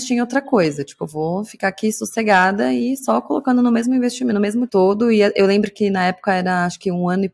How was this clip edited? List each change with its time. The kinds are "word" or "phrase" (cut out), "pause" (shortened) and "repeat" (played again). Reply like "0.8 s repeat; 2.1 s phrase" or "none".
4.7 s phrase